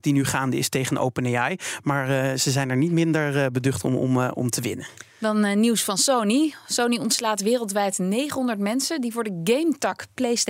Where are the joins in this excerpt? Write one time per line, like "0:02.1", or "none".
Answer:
0:05.1